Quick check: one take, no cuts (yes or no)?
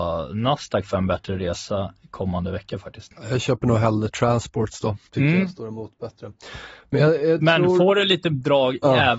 no